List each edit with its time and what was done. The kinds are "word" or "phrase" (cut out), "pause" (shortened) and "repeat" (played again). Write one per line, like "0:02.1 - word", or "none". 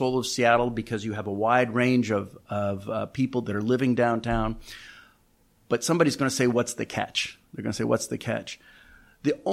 none